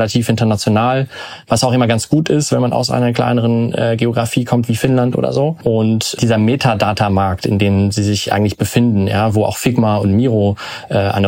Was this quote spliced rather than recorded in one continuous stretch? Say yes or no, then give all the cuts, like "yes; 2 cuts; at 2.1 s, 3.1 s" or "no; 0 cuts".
no; 0 cuts